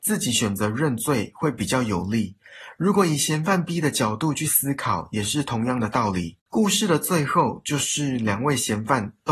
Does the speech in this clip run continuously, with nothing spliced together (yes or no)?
no